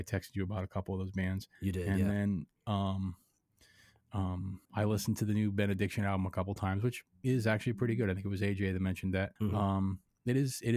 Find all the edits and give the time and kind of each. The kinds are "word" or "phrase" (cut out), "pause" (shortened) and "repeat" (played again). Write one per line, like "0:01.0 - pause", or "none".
0:01.5 - pause
0:02.5 - pause
0:04.6 - pause
0:09.4 - pause